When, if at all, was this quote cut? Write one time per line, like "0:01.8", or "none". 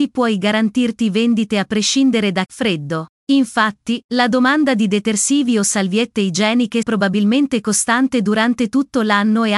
0:02.5
0:03.2
0:06.8